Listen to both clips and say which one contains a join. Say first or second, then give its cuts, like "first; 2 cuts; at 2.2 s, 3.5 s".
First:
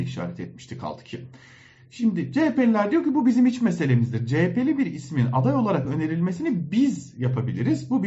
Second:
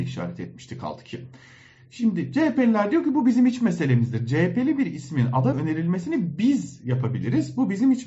second; 1 cut; at 5.5 s